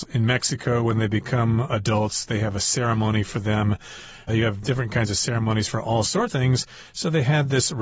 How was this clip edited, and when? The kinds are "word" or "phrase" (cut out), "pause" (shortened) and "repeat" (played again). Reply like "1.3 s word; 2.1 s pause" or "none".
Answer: 6.3 s word